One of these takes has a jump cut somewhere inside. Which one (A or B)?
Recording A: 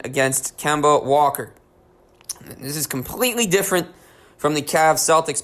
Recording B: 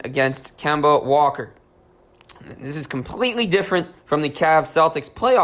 B